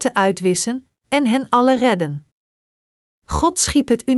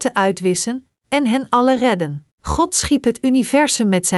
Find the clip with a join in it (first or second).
second